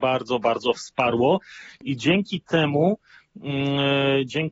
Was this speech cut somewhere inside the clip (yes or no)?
no